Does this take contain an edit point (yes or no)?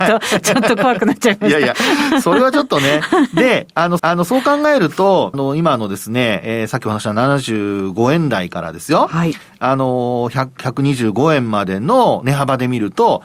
yes